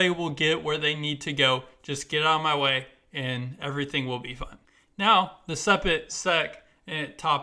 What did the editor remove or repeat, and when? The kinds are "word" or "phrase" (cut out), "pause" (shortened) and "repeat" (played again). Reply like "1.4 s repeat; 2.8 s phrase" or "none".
4.6 s pause